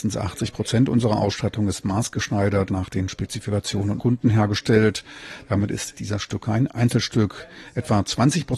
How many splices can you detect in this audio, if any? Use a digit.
3